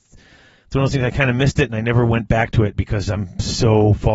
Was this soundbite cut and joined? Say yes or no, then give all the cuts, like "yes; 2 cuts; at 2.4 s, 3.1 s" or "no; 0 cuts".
no; 0 cuts